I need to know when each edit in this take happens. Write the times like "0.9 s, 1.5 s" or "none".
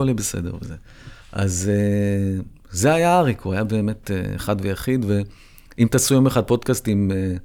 1.2 s